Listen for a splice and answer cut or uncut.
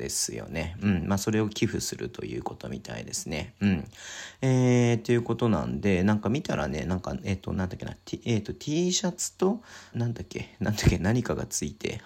cut